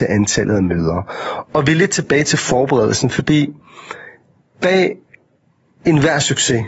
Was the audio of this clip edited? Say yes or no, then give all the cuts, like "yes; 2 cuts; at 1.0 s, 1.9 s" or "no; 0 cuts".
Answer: no; 0 cuts